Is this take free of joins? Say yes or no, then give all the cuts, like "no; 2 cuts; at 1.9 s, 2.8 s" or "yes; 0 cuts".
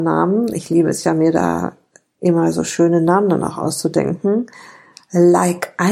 yes; 0 cuts